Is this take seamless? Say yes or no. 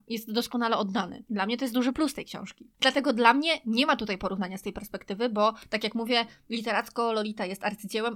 yes